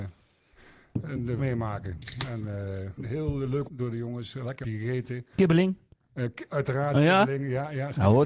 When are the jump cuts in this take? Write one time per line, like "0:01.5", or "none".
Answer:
0:01.4
0:03.0
0:03.6
0:04.6
0:05.3

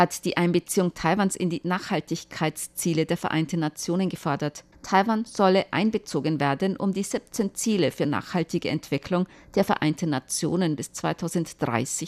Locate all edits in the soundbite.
none

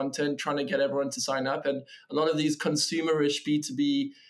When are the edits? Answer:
none

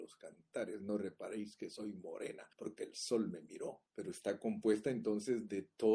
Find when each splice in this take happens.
0:02.5
0:03.9

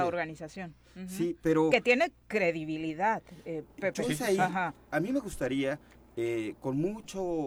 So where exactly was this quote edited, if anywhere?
0:03.7

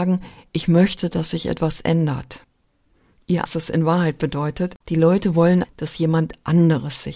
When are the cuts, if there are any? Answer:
0:03.5
0:04.8
0:05.6

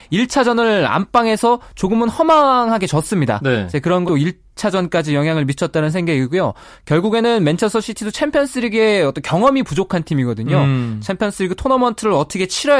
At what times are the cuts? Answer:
0:04.1

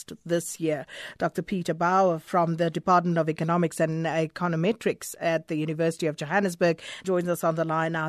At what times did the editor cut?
0:07.0

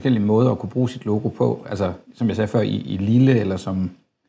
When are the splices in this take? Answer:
none

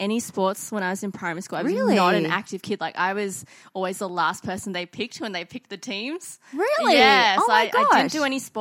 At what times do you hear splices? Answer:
none

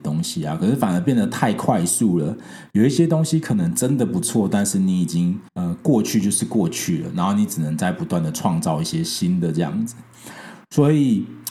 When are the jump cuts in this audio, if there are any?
0:05.5

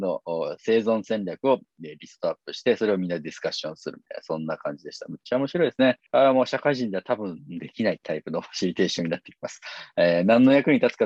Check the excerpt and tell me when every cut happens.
0:06.1

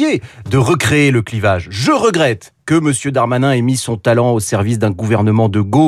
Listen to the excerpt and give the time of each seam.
none

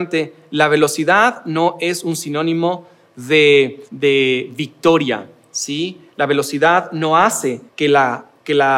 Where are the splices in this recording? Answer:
0:03.9
0:07.7

